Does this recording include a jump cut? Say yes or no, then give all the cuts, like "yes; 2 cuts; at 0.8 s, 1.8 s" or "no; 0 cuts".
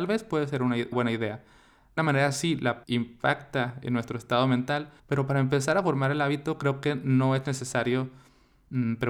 yes; 4 cuts; at 0.9 s, 2.0 s, 2.8 s, 5.0 s